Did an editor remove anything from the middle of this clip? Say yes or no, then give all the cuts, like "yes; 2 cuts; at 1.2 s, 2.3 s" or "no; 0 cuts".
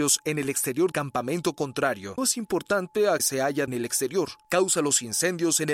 yes; 4 cuts; at 0.9 s, 2.2 s, 3.2 s, 3.7 s